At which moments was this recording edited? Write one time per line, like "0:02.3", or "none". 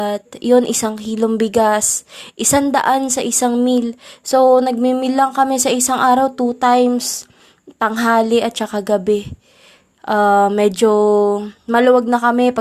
none